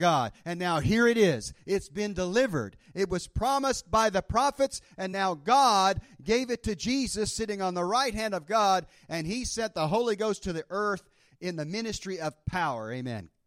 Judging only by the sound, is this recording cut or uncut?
uncut